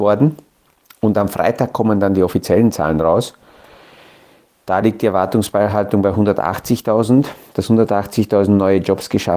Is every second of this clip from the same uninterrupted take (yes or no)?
yes